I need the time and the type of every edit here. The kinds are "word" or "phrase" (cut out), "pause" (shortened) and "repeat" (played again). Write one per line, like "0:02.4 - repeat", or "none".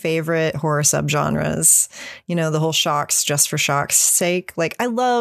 none